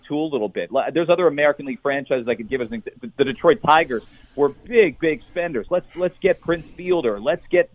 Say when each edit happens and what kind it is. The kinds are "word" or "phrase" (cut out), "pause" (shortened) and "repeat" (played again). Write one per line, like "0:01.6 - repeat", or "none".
none